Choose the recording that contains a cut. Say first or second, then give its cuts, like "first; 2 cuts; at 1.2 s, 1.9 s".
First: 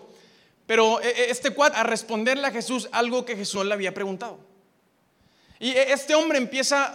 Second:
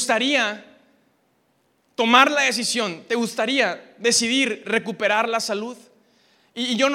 first; 2 cuts; at 1.7 s, 3.6 s